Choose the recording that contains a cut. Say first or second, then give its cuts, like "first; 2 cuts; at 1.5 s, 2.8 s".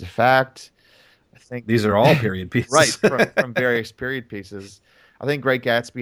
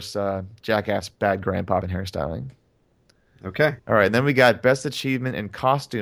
second; 3 cuts; at 1.1 s, 1.8 s, 3.8 s